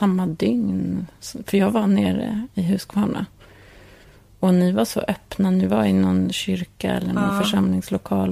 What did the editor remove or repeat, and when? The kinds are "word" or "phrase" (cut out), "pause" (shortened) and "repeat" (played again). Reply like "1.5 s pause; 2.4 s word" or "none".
none